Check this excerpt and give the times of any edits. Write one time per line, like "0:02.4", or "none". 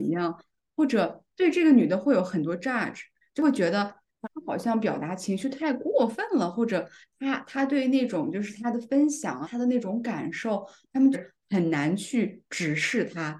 0:01.3